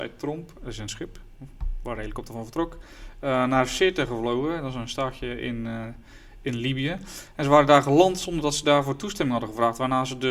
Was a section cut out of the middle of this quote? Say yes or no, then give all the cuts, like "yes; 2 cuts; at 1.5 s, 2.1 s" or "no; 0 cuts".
no; 0 cuts